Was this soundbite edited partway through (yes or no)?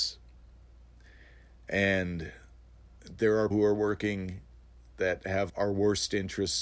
yes